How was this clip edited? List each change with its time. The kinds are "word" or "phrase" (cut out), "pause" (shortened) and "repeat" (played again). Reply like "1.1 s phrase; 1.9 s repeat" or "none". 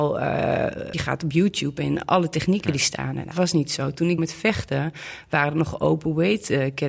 0.9 s word; 3.3 s word; 4.2 s word